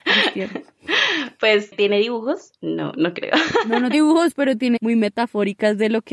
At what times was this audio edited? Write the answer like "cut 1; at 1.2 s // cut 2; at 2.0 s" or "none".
cut 1; at 3.9 s // cut 2; at 4.8 s